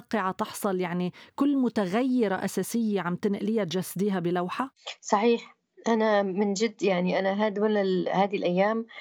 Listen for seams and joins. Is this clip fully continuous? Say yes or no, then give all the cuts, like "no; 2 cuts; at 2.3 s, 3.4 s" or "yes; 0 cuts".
yes; 0 cuts